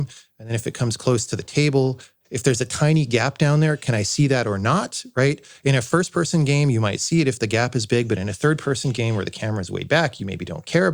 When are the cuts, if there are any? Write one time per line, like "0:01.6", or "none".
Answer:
none